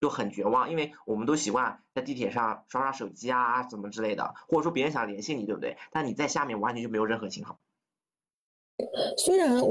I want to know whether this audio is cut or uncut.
uncut